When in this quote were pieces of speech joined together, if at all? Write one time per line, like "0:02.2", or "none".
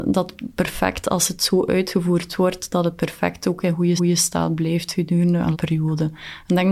0:04.0
0:05.5